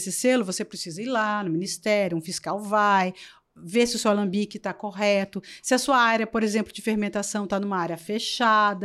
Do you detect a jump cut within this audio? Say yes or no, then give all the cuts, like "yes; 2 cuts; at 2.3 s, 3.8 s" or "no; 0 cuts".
no; 0 cuts